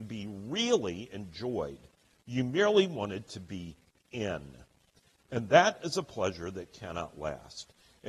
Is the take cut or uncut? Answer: uncut